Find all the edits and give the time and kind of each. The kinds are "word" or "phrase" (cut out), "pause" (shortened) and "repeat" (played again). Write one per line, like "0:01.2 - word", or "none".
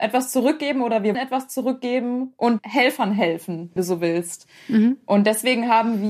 0:01.1 - word
0:02.6 - word
0:03.8 - word